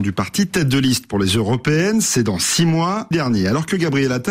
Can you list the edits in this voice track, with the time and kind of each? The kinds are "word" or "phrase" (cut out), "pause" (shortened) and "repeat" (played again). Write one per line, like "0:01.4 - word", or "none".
0:03.1 - word